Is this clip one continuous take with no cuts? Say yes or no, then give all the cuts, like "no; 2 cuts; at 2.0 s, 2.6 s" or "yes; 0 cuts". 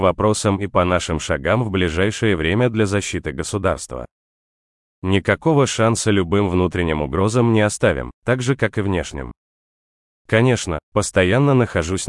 yes; 0 cuts